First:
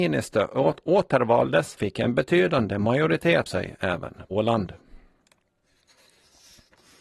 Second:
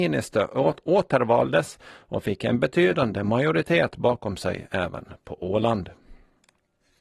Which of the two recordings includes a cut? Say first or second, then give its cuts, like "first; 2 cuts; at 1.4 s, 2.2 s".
first; 3 cuts; at 1.8 s, 3.5 s, 4.3 s